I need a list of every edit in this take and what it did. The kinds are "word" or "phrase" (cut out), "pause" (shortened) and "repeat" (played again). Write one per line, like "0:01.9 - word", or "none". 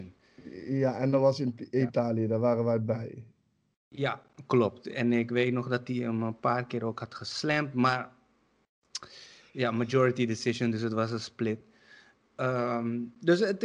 none

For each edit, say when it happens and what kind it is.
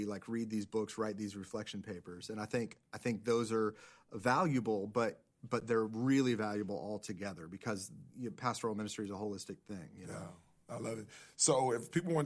0:08.1 - pause

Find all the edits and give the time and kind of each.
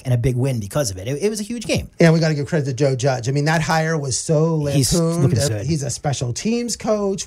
0:05.5 - word

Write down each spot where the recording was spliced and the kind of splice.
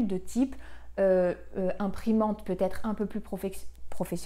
none

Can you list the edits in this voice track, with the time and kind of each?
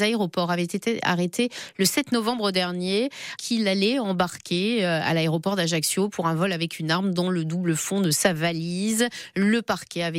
0:03.4 - word

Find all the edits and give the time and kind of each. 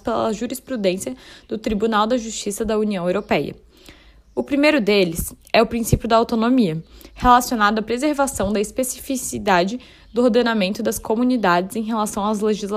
none

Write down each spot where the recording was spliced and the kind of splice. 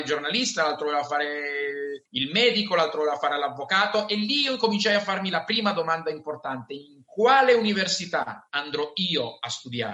0:02.1 - pause

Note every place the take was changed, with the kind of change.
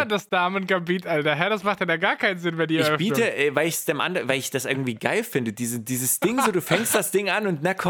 none

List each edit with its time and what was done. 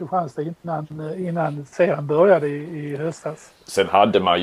none

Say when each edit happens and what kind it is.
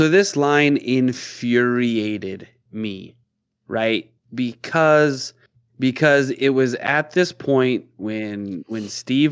none

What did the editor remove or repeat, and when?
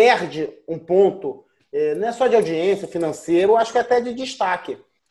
none

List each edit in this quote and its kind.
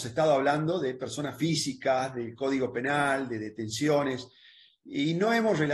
none

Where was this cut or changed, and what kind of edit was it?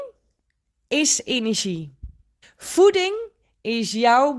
0:02.4 - pause

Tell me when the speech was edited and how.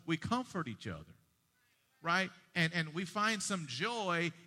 none

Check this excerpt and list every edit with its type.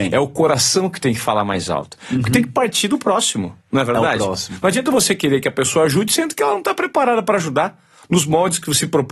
none

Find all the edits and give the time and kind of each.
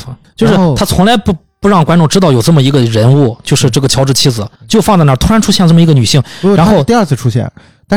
0:04.6 - pause

